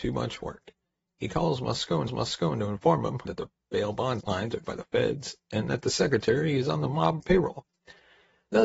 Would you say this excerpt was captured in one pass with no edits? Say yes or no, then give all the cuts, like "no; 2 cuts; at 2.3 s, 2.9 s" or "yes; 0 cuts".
no; 4 cuts; at 2.1 s, 3.3 s, 4.2 s, 4.6 s